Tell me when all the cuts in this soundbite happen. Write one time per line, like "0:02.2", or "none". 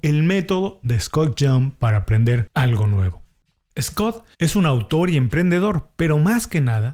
0:04.3